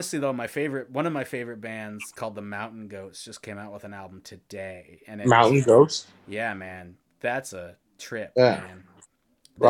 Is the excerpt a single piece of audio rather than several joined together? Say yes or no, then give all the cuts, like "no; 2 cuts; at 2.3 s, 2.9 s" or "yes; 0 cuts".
yes; 0 cuts